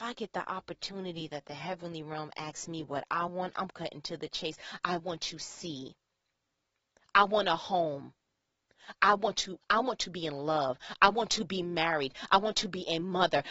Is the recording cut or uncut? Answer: uncut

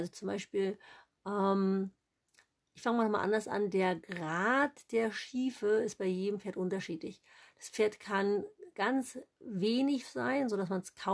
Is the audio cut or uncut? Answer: cut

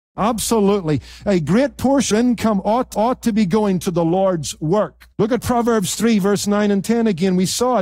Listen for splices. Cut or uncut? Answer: cut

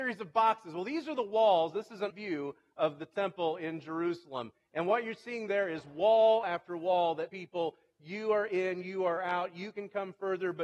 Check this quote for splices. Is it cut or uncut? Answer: cut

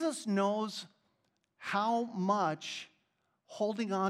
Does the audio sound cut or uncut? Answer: uncut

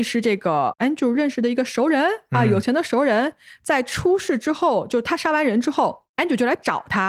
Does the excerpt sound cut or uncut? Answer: uncut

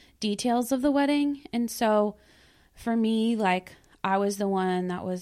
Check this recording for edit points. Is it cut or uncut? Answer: uncut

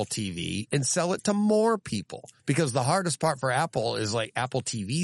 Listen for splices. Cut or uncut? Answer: cut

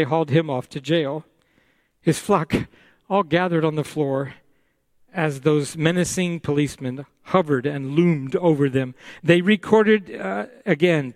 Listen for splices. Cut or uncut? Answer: uncut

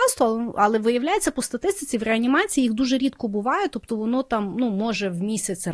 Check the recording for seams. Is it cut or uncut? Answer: uncut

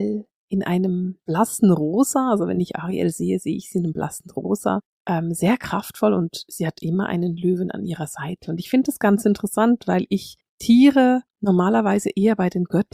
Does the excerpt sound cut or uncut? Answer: uncut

